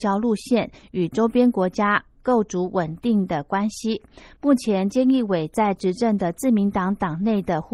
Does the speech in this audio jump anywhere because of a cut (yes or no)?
yes